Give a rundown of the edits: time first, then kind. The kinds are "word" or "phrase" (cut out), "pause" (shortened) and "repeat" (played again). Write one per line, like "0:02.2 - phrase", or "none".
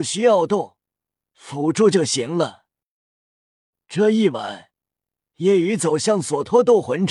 none

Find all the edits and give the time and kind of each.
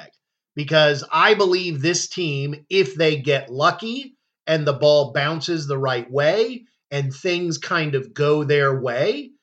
none

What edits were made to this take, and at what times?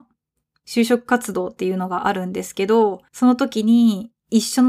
0:03.1 - pause

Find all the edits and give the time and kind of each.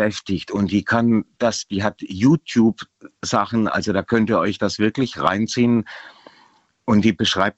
none

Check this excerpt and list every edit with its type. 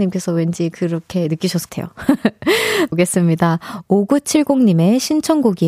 0:01.7 - word
0:02.9 - phrase

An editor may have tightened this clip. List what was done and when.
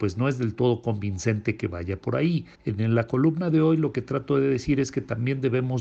0:02.5 - pause

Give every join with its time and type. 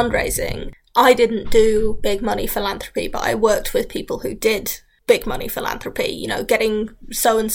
none

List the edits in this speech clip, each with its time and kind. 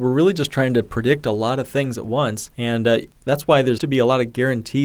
0:02.5 - pause
0:03.8 - word

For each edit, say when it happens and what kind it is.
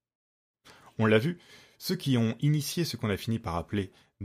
none

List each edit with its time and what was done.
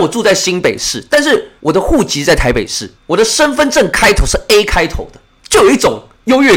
0:01.6 - pause

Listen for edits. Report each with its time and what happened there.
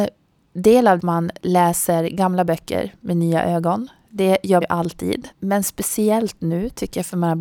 0:01.0 - phrase
0:04.6 - word
0:05.3 - pause

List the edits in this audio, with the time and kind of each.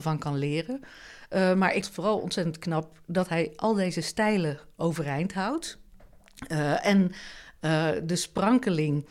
0:01.8 - word

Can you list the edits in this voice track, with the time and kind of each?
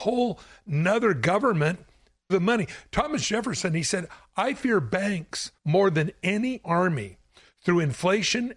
0:02.3 - word
0:05.6 - pause
0:06.6 - word

